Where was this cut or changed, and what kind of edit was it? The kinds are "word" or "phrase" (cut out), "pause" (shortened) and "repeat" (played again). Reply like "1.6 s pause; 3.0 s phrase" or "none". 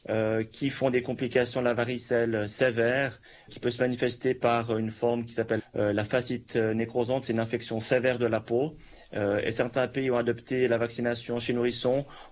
3.5 s word; 5.6 s word